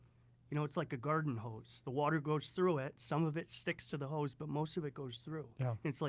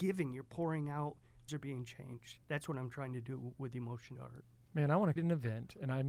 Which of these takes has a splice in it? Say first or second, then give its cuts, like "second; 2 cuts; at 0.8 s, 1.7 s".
second; 4 cuts; at 1.5 s, 2.4 s, 4.2 s, 5.2 s